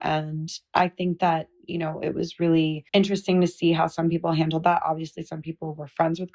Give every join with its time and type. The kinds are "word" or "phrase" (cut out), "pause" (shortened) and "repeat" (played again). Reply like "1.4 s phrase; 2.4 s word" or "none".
2.9 s pause

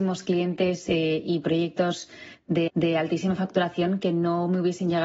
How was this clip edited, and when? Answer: 2.7 s repeat

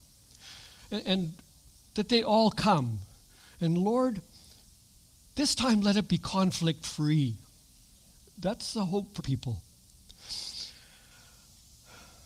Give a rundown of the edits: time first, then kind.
9.2 s word

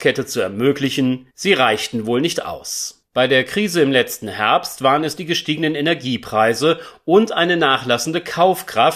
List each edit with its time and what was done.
1.3 s pause

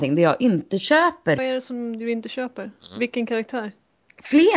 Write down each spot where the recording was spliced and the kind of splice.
1.4 s phrase

